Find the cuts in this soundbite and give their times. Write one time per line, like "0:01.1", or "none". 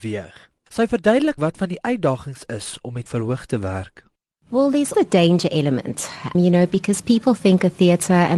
0:01.4
0:03.1
0:04.2
0:04.9
0:06.3

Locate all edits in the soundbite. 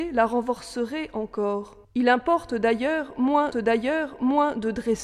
0:01.8
0:03.5

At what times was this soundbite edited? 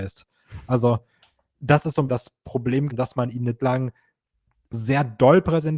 0:02.1
0:02.9
0:03.6
0:04.7

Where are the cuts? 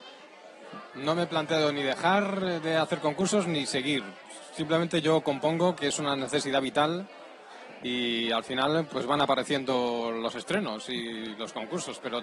none

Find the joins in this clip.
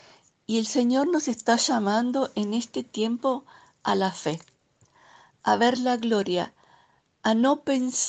none

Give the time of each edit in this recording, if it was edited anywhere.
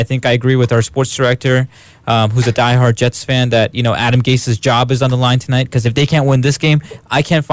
none

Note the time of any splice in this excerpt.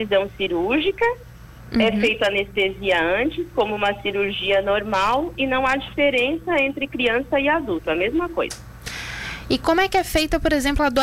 none

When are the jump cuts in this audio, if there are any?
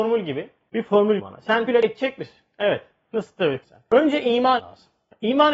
0:01.2
0:01.7
0:03.6
0:04.6

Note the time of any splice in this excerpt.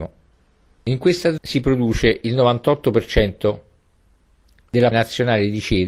0:01.4
0:04.9

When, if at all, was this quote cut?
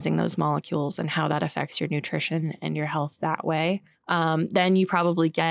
0:03.9

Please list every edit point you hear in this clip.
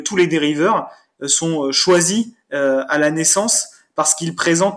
none

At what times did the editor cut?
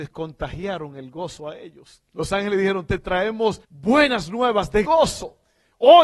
0:02.1
0:03.6
0:04.8

